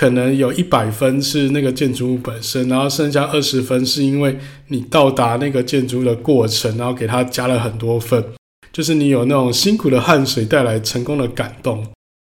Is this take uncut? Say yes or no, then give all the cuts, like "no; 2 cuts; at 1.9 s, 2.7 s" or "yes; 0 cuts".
yes; 0 cuts